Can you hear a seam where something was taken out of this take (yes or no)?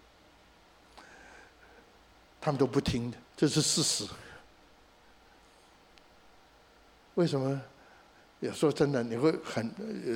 yes